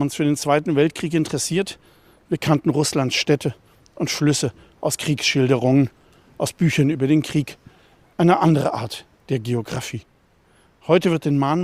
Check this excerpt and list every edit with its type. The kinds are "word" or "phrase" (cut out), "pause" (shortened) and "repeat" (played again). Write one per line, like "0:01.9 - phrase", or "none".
none